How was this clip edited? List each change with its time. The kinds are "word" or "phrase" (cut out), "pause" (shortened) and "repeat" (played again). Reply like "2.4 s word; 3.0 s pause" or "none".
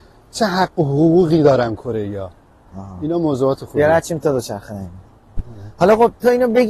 none